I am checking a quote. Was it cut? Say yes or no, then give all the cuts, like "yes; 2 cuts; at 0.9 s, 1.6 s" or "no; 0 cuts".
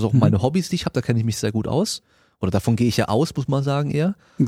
no; 0 cuts